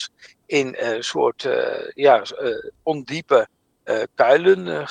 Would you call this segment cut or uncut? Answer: uncut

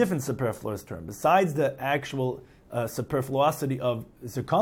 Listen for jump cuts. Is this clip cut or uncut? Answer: uncut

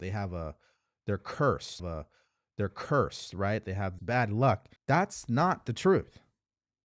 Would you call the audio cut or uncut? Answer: cut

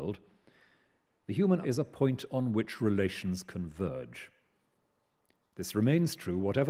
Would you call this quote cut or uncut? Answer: cut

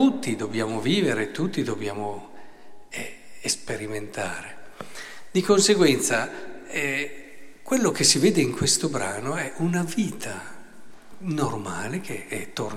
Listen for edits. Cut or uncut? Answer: uncut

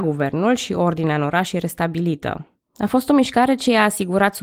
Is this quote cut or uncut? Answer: uncut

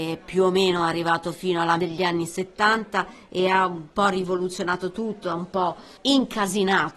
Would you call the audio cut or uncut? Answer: cut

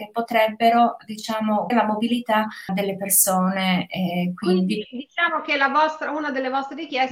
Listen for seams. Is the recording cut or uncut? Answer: cut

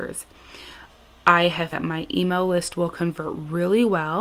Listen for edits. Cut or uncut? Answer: cut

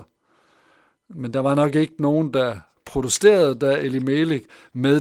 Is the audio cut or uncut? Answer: uncut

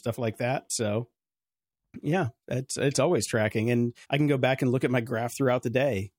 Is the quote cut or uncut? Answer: cut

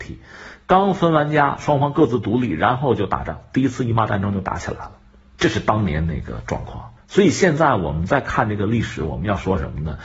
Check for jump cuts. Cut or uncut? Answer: cut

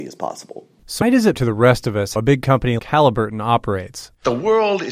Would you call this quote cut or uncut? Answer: cut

